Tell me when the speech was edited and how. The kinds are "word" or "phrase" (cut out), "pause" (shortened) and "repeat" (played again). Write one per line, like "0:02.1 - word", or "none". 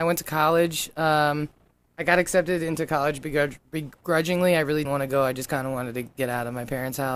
0:04.8 - word